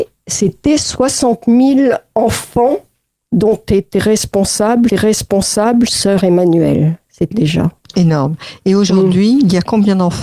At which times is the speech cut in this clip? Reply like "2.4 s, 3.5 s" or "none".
4.9 s, 7.3 s